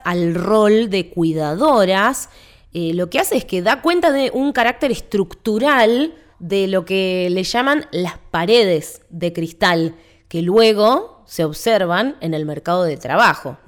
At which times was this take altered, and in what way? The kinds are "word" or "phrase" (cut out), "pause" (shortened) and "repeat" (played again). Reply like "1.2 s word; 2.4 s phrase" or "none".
none